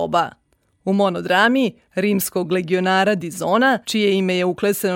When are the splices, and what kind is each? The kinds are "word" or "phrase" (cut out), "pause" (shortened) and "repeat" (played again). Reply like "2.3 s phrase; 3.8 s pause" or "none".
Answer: 3.8 s pause